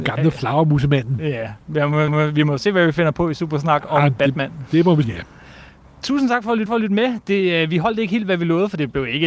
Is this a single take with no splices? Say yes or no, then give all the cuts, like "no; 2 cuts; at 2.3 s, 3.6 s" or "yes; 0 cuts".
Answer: no; 3 cuts; at 2.1 s, 5.0 s, 6.7 s